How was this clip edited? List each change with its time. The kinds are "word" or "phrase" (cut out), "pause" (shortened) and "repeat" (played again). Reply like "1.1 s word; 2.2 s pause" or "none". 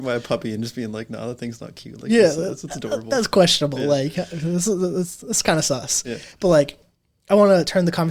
none